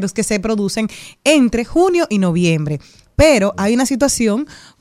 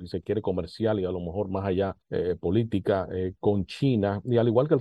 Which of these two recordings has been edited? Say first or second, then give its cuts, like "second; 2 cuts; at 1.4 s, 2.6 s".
second; 1 cut; at 2.0 s